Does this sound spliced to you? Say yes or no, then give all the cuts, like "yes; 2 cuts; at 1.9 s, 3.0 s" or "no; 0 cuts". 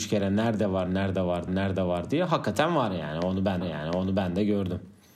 yes; 2 cuts; at 1.5 s, 3.6 s